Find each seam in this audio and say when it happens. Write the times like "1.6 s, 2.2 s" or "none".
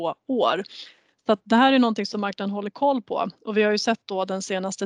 none